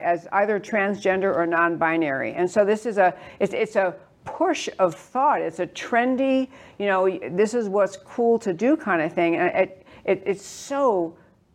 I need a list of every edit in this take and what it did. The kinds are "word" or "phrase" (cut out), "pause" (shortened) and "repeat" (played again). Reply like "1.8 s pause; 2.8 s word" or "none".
none